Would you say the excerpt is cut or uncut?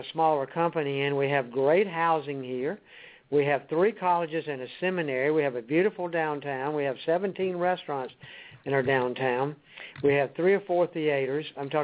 uncut